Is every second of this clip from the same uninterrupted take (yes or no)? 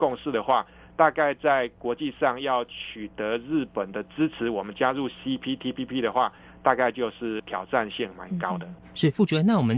yes